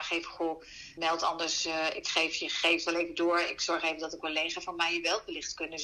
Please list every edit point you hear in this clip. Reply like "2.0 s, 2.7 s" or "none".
1.0 s